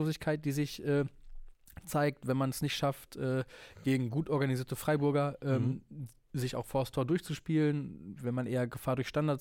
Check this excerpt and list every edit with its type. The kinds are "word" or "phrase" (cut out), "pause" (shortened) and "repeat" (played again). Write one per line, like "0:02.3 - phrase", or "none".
none